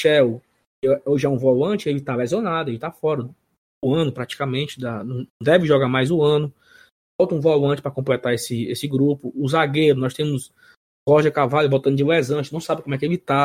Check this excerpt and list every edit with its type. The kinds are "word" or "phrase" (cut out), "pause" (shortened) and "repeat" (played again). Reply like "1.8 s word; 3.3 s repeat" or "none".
5.3 s pause